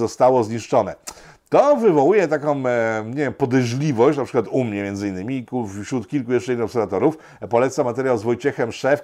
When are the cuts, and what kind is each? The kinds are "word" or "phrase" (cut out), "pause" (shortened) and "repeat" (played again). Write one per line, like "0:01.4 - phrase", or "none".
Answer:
none